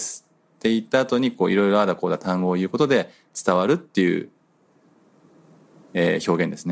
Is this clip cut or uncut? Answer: uncut